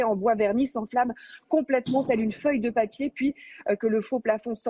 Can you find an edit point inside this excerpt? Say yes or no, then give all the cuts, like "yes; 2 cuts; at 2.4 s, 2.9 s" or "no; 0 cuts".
no; 0 cuts